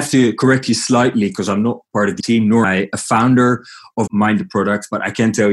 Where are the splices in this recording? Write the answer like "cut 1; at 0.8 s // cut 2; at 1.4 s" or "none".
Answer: cut 1; at 2.2 s // cut 2; at 2.6 s // cut 3; at 4.1 s